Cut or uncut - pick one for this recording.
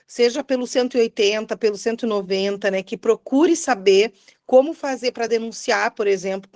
uncut